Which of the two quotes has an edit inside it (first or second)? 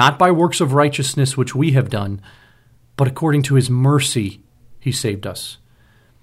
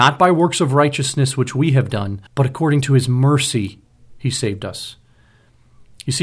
second